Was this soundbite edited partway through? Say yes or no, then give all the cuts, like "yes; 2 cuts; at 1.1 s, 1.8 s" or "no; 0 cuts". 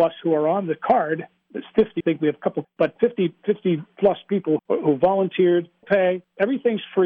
yes; 5 cuts; at 2.0 s, 2.6 s, 3.0 s, 4.6 s, 5.8 s